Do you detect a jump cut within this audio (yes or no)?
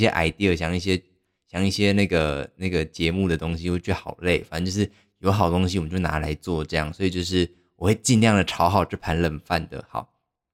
no